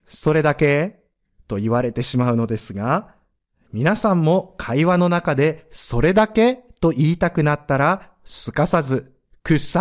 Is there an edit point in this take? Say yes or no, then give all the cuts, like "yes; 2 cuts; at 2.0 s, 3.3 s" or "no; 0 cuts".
no; 0 cuts